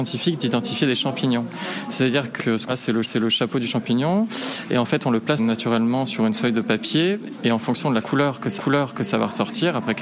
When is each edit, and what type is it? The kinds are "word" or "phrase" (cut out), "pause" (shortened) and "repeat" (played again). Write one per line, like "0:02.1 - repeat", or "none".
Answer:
0:02.4 - word
0:02.7 - word
0:03.0 - repeat
0:05.4 - word
0:08.6 - repeat